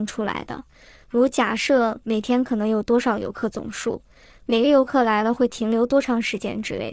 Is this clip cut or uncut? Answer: uncut